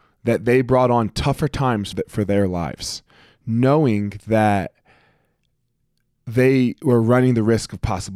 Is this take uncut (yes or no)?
no